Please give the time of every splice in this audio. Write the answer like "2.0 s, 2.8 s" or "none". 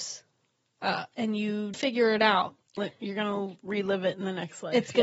1.7 s, 2.8 s